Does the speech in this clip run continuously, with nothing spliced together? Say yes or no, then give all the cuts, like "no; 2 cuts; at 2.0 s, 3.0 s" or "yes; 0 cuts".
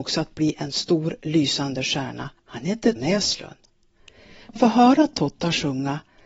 no; 3 cuts; at 2.4 s, 3.0 s, 4.6 s